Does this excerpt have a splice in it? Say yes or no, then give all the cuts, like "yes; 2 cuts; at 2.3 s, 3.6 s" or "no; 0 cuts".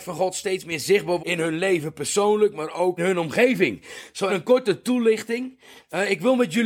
yes; 3 cuts; at 1.2 s, 3.0 s, 4.3 s